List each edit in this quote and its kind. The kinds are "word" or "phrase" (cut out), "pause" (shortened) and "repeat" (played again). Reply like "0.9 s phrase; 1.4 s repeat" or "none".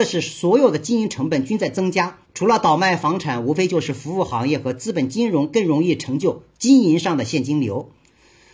2.2 s pause